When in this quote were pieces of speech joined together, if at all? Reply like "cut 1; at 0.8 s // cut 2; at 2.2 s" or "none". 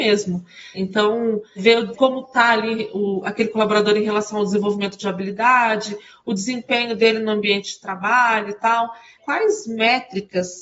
none

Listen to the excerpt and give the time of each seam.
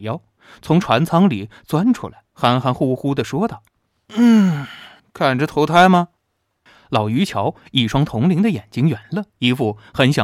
cut 1; at 2.3 s // cut 2; at 3.7 s // cut 3; at 5.0 s // cut 4; at 6.2 s // cut 5; at 9.3 s

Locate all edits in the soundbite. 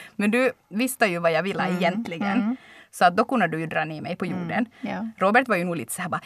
none

